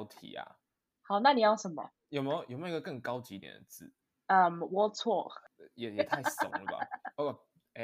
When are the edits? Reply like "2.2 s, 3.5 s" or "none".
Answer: none